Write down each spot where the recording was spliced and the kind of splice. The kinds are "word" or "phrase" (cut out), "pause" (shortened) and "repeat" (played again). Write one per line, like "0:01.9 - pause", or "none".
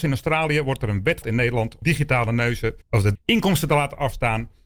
0:01.2 - word
0:01.8 - word
0:02.8 - pause
0:03.1 - phrase